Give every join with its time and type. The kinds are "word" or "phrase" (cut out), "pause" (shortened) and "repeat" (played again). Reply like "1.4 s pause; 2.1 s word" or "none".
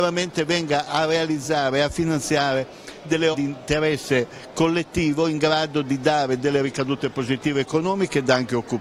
3.3 s word